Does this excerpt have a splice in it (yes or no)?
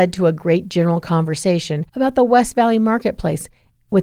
yes